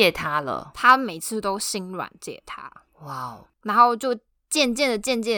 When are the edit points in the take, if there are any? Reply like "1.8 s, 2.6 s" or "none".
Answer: 3.4 s